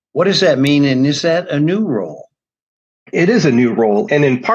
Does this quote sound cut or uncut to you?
uncut